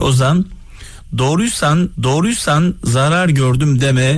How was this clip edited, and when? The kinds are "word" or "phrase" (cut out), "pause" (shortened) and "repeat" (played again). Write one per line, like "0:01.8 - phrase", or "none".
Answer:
0:01.9 - repeat